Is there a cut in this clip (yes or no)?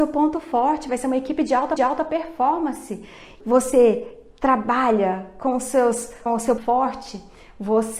yes